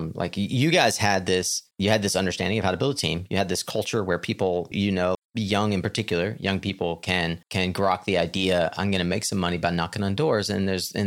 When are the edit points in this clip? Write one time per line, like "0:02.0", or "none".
0:01.7
0:04.7
0:05.1
0:07.4